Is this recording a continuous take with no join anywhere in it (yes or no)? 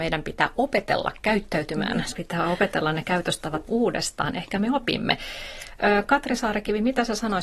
no